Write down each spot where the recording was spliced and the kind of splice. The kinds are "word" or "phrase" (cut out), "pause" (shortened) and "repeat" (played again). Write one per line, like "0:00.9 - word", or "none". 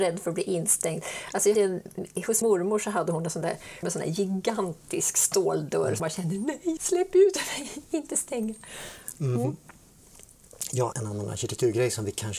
0:01.5 - word
0:02.4 - word
0:03.8 - word
0:06.0 - word
0:06.8 - word
0:10.9 - word